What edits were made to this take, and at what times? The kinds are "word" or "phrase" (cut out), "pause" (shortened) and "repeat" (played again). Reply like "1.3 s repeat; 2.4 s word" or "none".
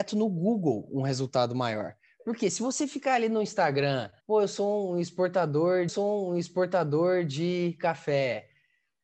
4.2 s pause; 5.9 s repeat